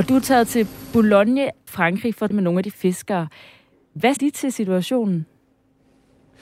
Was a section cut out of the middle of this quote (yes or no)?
yes